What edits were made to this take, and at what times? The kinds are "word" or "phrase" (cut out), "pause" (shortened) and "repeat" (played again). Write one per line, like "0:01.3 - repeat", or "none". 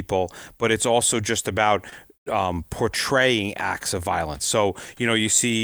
none